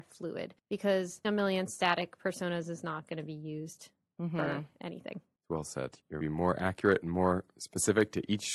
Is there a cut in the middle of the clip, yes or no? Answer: yes